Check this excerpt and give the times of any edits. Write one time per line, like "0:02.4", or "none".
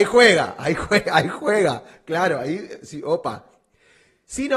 none